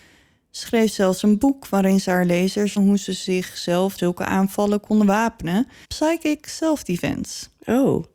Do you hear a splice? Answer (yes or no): yes